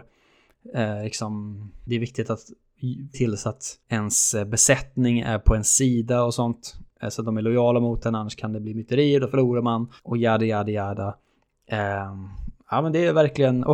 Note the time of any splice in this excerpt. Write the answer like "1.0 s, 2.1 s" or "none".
1.9 s, 3.1 s, 3.8 s, 10.0 s